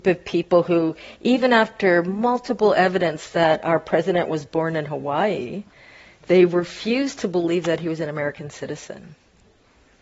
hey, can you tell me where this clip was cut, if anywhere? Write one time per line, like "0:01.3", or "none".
none